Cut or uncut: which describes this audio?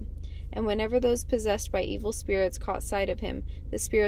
uncut